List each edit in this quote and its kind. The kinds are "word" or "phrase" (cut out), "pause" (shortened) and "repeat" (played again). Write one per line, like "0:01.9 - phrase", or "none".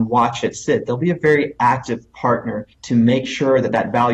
0:02.7 - pause